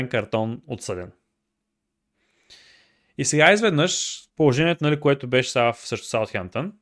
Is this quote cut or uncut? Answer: cut